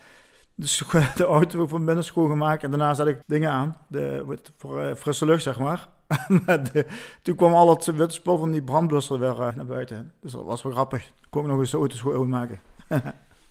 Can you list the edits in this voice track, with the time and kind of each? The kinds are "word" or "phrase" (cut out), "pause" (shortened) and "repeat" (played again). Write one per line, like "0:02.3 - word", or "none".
0:03.2 - word
0:09.5 - word